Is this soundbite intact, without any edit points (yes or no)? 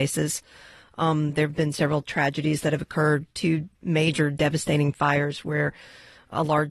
yes